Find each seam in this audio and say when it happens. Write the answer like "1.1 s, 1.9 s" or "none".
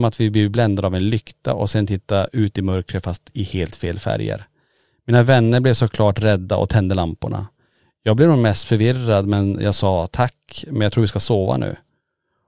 none